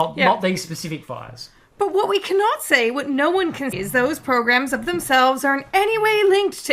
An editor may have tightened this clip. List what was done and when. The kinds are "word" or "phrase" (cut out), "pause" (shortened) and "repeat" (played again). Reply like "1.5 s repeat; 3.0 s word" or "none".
3.7 s word